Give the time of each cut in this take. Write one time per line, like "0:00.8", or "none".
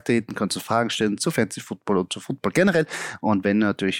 none

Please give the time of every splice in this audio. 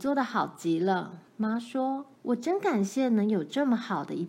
0:01.3
0:02.2

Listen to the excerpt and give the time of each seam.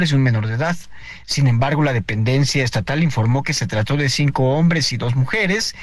none

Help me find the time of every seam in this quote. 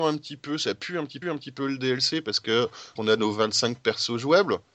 0:01.2
0:03.0

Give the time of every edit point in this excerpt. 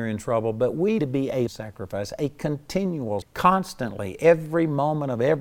0:01.0
0:01.5
0:03.2

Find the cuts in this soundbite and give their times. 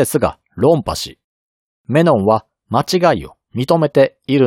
none

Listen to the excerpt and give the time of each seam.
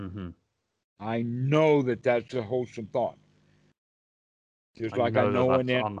none

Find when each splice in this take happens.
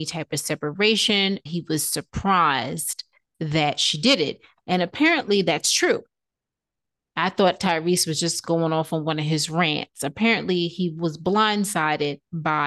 0:01.5

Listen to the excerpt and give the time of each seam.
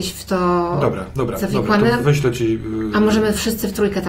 none

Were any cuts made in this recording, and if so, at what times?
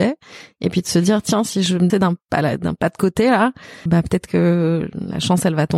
0:01.9
0:03.9

